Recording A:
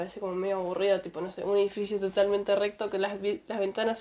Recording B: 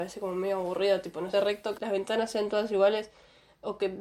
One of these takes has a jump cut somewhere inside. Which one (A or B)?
B